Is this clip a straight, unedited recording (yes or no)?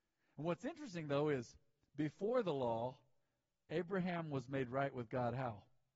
yes